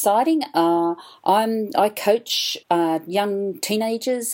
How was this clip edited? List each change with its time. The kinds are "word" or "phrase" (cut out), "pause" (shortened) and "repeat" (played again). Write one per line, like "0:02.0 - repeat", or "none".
0:02.6 - pause